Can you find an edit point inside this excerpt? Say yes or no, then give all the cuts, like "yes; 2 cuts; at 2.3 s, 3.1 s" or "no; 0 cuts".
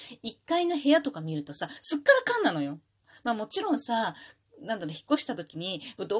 no; 0 cuts